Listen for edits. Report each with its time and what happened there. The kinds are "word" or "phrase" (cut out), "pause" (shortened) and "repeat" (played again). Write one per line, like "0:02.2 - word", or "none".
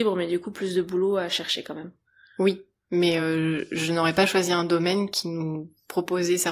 none